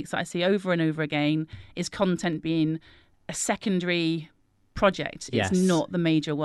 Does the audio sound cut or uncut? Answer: uncut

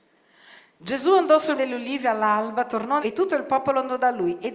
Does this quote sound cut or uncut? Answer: cut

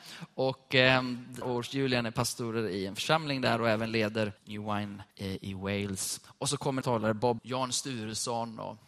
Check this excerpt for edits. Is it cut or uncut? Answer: cut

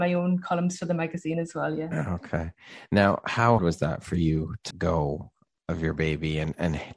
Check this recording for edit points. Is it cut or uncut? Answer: cut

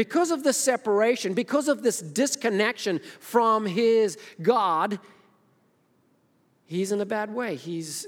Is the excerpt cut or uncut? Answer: uncut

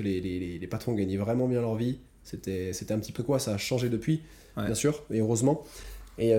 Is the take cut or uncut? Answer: cut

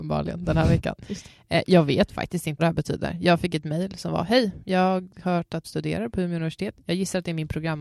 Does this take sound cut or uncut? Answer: cut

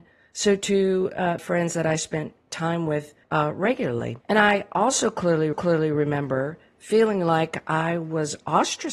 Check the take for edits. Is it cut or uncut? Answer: cut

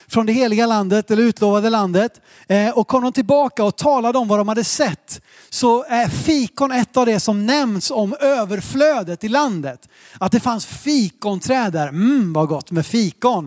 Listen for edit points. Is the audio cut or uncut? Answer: uncut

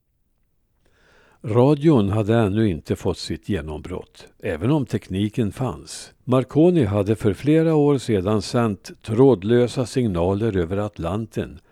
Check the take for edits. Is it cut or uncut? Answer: cut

